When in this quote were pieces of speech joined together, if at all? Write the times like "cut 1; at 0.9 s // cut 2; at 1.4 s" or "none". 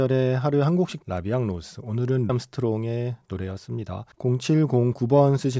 cut 1; at 1.0 s // cut 2; at 2.3 s // cut 3; at 4.1 s